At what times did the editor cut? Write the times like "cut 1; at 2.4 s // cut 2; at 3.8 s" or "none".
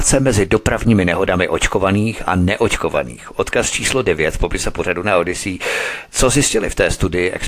none

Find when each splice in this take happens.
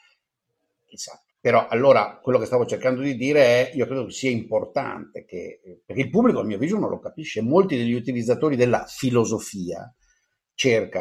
cut 1; at 1.3 s

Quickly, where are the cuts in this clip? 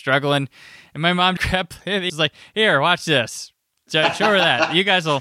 cut 1; at 1.4 s // cut 2; at 2.1 s

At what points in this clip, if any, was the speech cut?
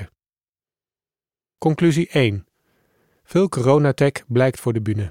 none

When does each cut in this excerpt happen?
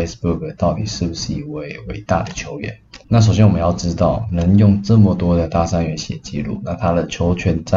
cut 1; at 3.0 s

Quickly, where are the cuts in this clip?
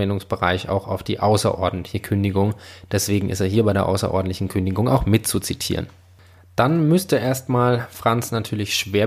none

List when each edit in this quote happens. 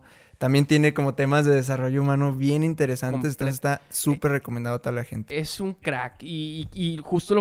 none

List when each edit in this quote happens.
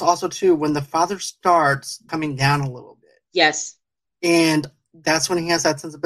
cut 1; at 2.1 s // cut 2; at 3.3 s

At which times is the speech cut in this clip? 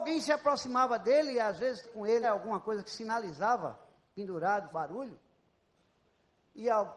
cut 1; at 1.3 s // cut 2; at 1.8 s // cut 3; at 2.2 s // cut 4; at 4.7 s

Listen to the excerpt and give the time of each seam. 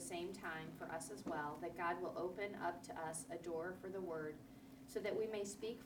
none

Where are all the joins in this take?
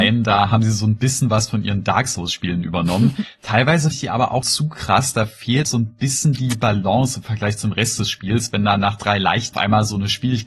cut 1; at 3.9 s // cut 2; at 4.4 s // cut 3; at 5.7 s // cut 4; at 9.5 s

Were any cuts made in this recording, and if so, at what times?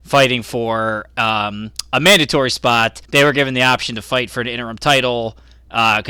cut 1; at 3.0 s

